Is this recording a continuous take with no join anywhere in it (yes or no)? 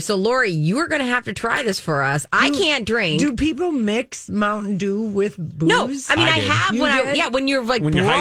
yes